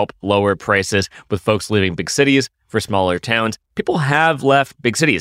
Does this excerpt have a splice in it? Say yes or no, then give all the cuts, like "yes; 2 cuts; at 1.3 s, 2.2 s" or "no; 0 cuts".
yes; 1 cut; at 3.6 s